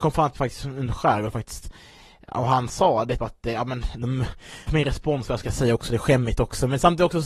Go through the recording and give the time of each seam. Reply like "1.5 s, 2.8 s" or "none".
3.2 s, 4.7 s